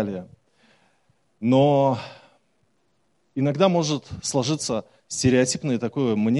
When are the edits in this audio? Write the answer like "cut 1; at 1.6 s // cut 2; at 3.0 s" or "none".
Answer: none